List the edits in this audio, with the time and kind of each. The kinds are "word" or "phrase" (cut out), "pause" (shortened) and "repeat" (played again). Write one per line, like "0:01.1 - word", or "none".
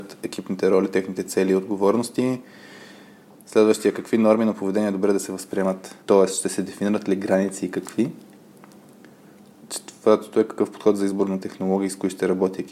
0:06.0 - pause

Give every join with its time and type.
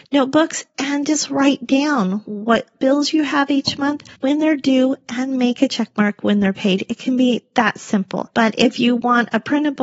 0:04.2 - pause

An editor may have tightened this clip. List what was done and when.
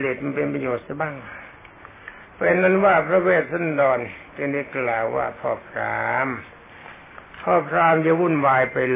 0:02.3 - pause
0:04.3 - pause

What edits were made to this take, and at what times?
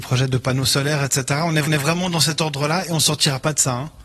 0:01.7 - repeat

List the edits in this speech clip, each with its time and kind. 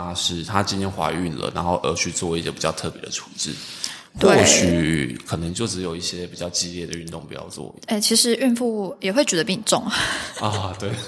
0:07.8 - pause

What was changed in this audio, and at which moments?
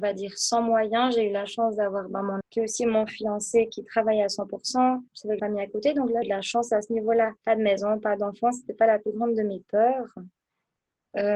0:02.4 - word
0:05.1 - pause
0:05.4 - phrase
0:06.2 - word
0:07.4 - pause

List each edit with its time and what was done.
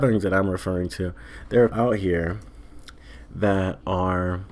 0:01.7 - word

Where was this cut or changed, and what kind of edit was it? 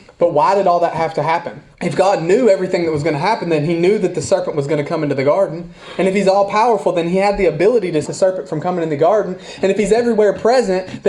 0:01.7 - pause
0:08.0 - word

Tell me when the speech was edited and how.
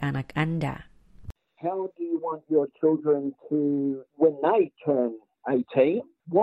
none

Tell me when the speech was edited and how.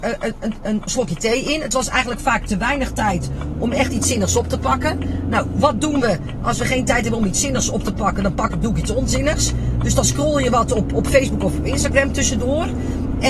none

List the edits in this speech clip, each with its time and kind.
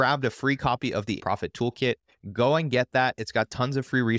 0:01.2 - word

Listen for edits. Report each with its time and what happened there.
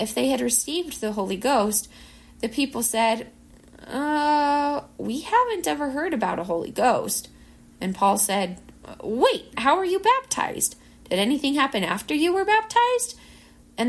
0:09.5 - word

